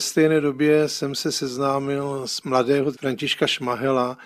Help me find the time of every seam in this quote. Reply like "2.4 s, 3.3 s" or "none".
2.4 s, 2.9 s